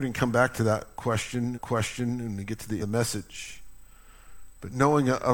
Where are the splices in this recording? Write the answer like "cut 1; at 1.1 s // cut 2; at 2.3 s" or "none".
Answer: cut 1; at 1.5 s // cut 2; at 2.8 s